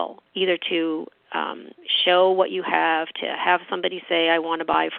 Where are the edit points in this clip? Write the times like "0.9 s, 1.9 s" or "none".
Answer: none